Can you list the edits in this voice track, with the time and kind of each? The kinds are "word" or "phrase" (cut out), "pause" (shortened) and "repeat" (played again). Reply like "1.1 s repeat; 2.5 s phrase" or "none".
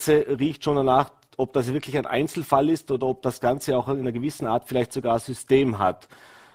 none